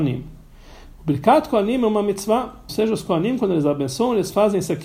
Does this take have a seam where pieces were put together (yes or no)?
yes